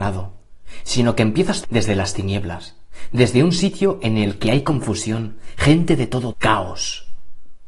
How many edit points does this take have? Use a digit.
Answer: 2